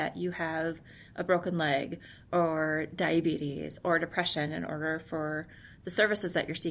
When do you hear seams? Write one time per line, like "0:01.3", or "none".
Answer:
none